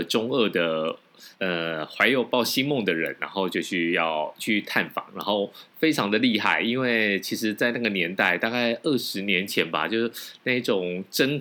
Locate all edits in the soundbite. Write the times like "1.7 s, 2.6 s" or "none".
1.3 s